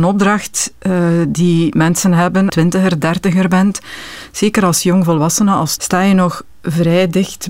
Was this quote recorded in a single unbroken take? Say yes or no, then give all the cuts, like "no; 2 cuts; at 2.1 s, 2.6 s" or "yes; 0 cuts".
no; 2 cuts; at 2.5 s, 5.8 s